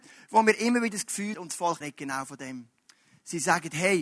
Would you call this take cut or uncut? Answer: cut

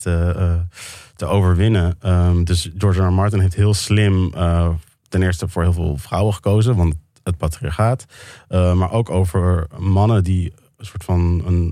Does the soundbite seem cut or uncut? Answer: uncut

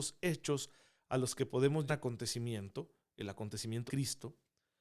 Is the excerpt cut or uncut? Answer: cut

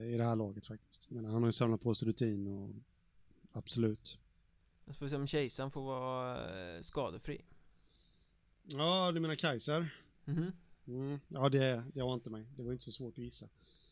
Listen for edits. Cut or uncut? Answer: uncut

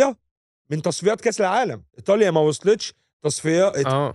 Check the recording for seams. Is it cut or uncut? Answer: cut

